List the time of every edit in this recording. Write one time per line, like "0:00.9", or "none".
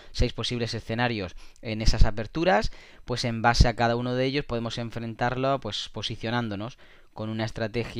none